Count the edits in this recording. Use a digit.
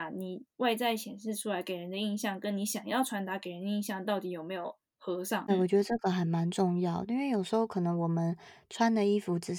1